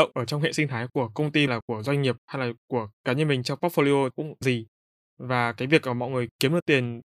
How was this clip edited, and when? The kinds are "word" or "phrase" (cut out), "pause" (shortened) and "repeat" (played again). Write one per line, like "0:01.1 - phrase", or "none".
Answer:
0:01.5 - phrase
0:04.1 - word
0:04.4 - phrase